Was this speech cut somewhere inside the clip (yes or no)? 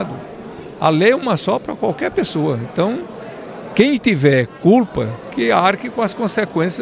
no